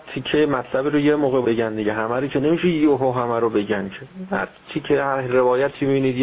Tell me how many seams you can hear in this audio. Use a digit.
1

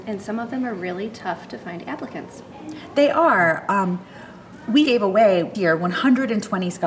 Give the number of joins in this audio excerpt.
2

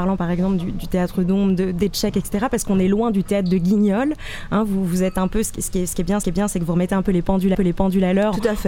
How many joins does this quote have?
2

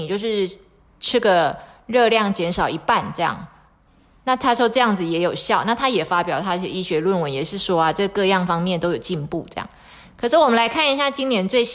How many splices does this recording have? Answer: 0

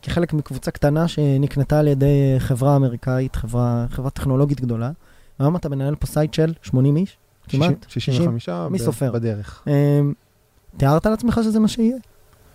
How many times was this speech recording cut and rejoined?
0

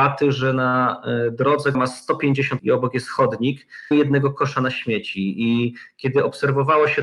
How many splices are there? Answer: 3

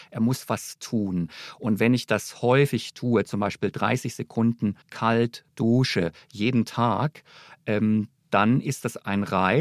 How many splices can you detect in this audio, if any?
1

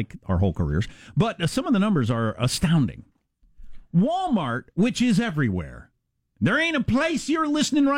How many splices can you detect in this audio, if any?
0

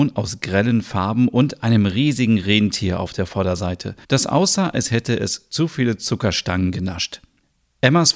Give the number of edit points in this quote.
1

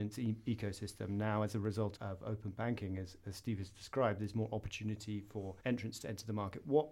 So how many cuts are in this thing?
2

